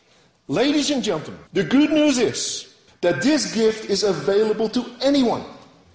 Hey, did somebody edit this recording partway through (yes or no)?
yes